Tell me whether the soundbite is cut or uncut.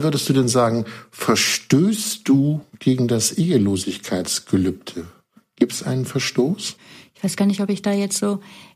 uncut